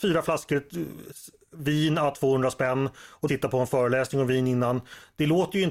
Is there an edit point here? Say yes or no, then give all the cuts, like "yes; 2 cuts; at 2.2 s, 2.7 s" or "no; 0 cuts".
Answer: yes; 1 cut; at 3.3 s